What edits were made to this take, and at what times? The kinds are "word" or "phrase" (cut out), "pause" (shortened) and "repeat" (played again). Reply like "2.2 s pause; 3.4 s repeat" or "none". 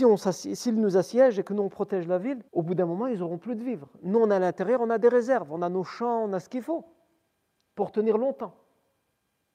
2.5 s pause